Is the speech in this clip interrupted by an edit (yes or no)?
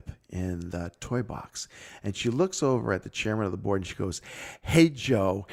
no